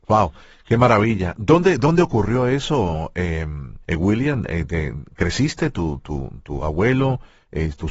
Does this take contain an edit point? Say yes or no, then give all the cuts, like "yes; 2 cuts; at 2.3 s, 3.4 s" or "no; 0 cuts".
yes; 1 cut; at 3.8 s